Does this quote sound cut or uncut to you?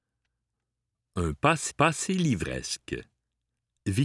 cut